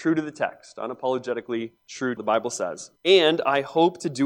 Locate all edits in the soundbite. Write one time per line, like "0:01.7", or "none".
0:01.8
0:02.2
0:03.0